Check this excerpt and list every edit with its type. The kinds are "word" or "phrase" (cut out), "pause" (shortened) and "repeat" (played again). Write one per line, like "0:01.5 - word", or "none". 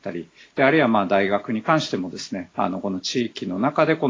0:02.5 - pause